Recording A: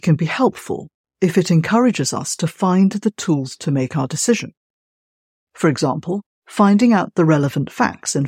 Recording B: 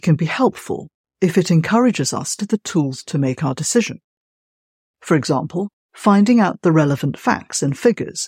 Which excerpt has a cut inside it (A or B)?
B